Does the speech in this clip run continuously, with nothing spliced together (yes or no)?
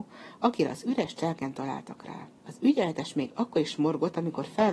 no